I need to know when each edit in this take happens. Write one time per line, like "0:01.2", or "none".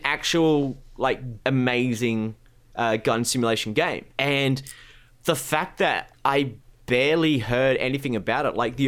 0:01.4
0:04.1
0:06.2